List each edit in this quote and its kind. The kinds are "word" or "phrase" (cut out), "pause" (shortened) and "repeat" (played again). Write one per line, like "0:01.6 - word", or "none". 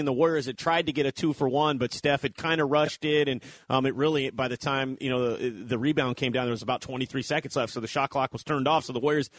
none

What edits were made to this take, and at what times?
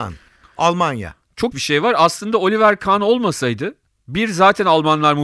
0:01.5 - word

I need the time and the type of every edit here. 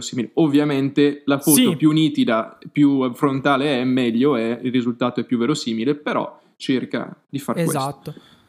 none

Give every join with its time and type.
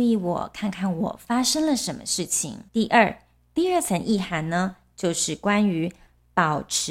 0:02.7 - pause

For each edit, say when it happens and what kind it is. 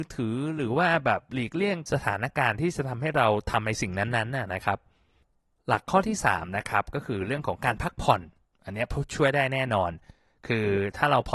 none

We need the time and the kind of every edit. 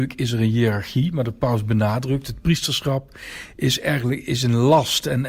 none

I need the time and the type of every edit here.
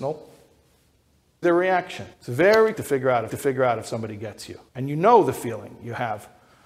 0:01.4 - phrase
0:02.1 - pause
0:02.7 - word
0:03.3 - repeat
0:04.7 - pause

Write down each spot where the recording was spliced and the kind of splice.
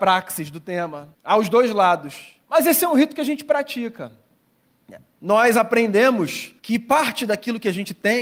0:01.1 - pause
0:02.4 - pause
0:06.6 - pause

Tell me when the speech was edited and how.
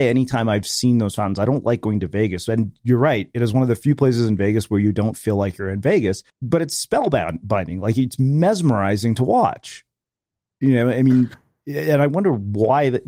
0:06.3 - pause

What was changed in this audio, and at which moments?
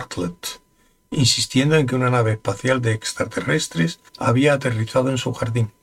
0:04.1 - pause

